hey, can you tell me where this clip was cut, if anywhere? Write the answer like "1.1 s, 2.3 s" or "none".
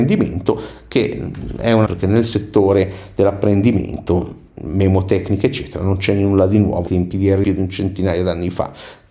1.9 s, 6.9 s, 7.4 s